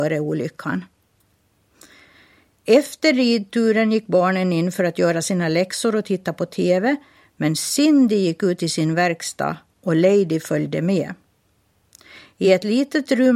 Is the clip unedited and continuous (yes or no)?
yes